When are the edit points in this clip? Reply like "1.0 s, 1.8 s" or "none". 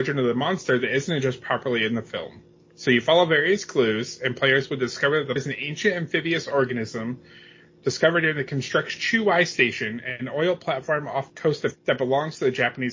5.4 s, 9.0 s, 11.3 s, 11.7 s